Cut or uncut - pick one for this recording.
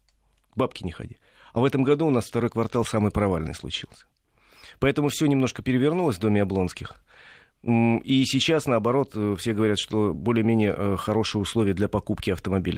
uncut